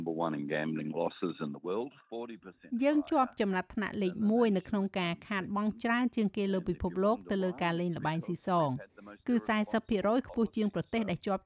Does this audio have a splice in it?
no; 0 cuts

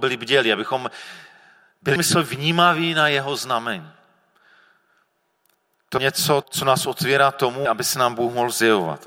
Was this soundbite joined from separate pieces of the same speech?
yes; 4 cuts; at 2.0 s, 6.0 s, 6.4 s, 7.7 s

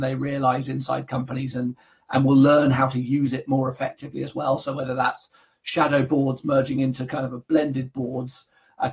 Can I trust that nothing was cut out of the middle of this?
yes; 0 cuts

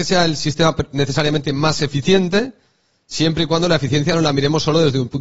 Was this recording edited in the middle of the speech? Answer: no; 0 cuts

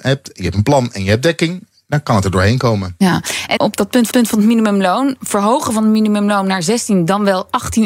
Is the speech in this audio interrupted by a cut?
yes; 2 cuts; at 3.6 s, 4.1 s

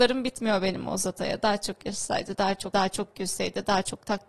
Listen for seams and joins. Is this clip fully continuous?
no; 1 cut; at 2.7 s

